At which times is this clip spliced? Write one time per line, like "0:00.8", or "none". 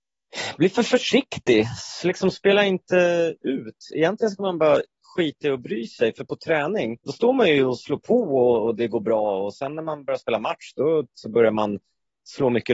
0:07.0
0:07.8
0:11.1